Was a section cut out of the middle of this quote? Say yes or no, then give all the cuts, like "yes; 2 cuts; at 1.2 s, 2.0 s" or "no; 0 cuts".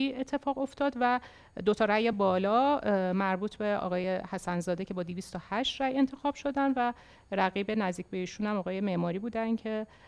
no; 0 cuts